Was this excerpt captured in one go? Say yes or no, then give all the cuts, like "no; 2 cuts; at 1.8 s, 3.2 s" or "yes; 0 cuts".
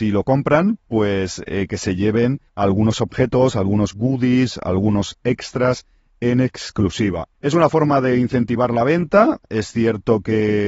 no; 2 cuts; at 2.5 s, 7.3 s